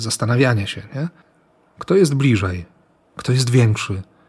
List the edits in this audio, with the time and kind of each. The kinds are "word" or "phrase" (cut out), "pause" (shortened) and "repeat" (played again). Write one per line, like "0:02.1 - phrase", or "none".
none

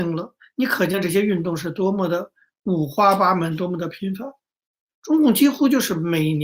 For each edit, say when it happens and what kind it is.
none

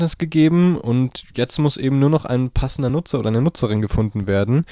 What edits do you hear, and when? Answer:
none

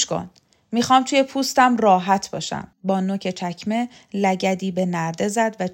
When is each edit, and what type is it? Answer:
0:02.7 - pause

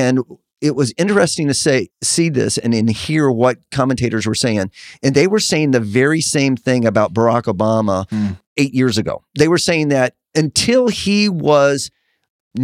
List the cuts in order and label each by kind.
0:01.9 - pause
0:08.5 - pause

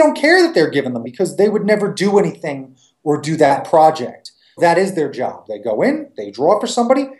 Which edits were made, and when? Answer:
0:01.0 - word
0:04.6 - word

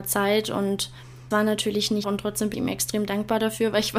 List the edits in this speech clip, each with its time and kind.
0:01.3 - word
0:02.0 - word
0:02.5 - word

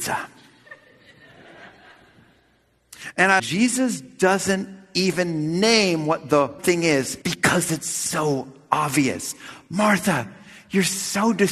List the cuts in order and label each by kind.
0:03.4 - phrase
0:06.6 - word
0:07.2 - pause

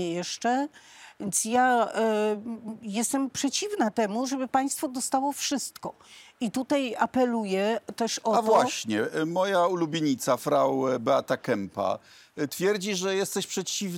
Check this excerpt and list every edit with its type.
0:10.4 - word

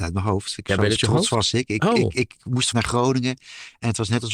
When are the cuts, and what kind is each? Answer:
0:01.0 - word
0:02.7 - word

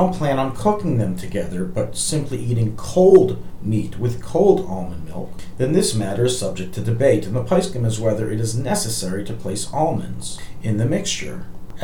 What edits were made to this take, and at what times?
none

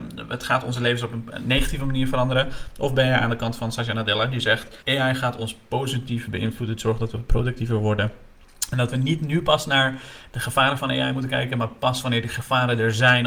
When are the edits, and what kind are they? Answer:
0:04.8 - pause

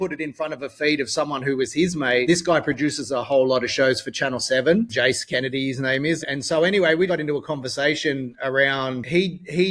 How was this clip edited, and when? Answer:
0:04.9 - word
0:06.2 - word
0:07.1 - word

